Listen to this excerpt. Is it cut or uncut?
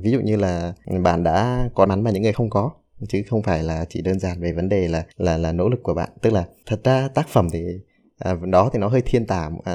cut